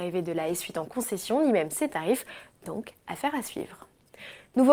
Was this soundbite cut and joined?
no; 0 cuts

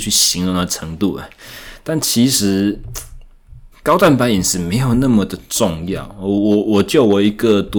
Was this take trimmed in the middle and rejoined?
yes; 1 cut; at 3.7 s

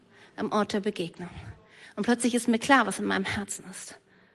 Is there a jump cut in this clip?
no; 0 cuts

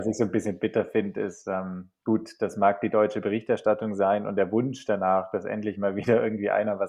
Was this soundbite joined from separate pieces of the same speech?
no; 0 cuts

